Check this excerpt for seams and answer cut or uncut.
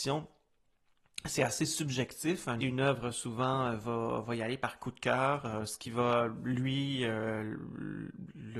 cut